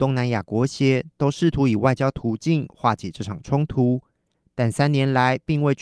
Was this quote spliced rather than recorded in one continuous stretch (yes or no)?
no